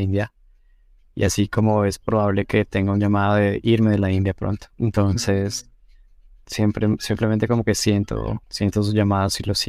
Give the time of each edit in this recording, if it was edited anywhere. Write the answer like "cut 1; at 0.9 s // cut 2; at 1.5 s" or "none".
cut 1; at 4.7 s // cut 2; at 8.4 s